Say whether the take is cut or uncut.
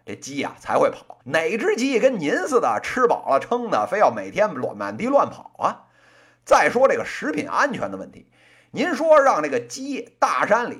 cut